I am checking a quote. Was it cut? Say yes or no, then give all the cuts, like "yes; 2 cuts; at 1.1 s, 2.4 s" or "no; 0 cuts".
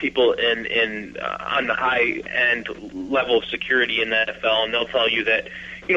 no; 0 cuts